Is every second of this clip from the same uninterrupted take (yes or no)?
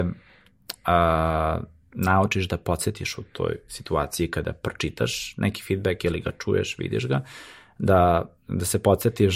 yes